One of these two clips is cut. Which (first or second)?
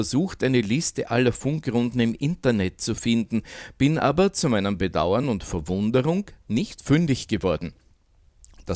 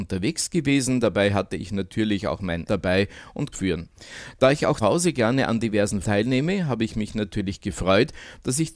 second